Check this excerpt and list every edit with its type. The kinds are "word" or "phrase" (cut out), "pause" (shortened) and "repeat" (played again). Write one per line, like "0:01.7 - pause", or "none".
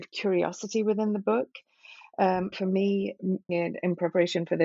0:02.5 - phrase
0:03.5 - word